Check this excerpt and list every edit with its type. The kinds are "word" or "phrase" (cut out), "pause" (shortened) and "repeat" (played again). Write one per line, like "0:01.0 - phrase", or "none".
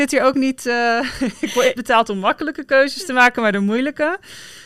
0:01.8 - phrase